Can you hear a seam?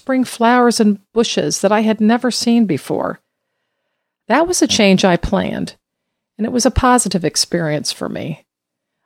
no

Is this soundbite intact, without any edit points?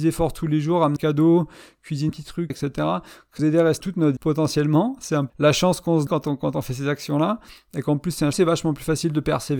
no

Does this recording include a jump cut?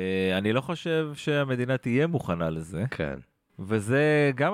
no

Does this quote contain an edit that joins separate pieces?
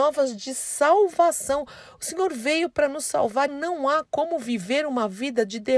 yes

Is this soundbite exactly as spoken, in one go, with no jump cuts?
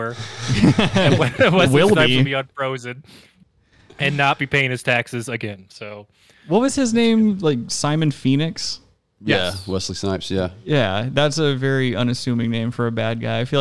yes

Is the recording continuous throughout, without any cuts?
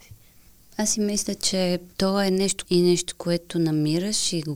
no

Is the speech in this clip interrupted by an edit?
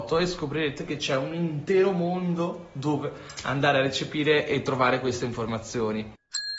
no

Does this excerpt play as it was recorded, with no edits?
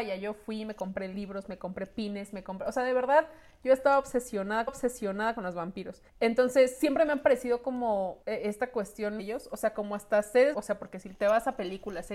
no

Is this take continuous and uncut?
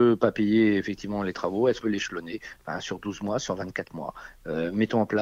no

